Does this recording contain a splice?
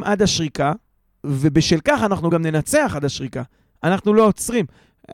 no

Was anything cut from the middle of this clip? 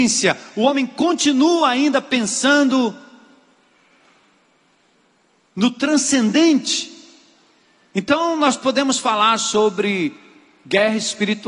no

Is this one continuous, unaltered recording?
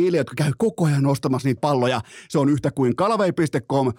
no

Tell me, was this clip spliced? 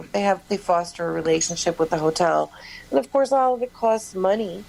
no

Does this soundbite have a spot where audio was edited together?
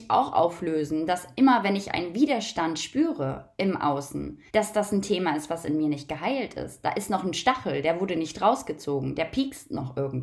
yes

